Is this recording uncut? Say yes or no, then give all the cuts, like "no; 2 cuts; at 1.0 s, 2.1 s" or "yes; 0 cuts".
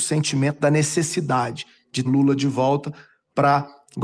no; 1 cut; at 2.0 s